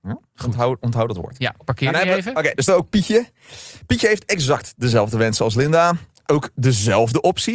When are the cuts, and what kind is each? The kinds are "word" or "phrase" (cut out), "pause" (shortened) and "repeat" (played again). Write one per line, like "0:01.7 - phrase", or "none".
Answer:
0:02.7 - word
0:06.3 - word